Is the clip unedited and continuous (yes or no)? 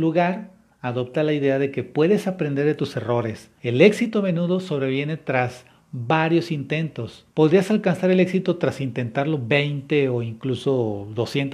no